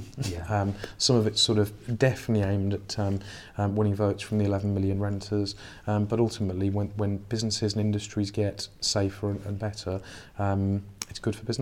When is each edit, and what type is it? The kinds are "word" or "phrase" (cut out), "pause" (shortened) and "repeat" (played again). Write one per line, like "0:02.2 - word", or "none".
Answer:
none